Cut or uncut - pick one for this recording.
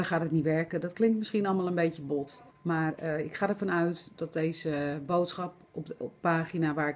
cut